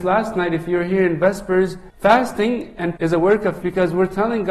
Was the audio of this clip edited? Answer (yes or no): yes